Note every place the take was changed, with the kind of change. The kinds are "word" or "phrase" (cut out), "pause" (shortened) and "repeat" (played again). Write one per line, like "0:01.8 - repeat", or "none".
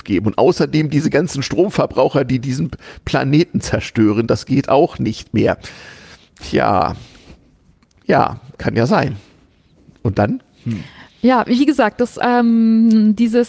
none